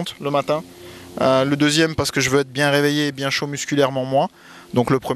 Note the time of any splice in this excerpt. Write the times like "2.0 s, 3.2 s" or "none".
none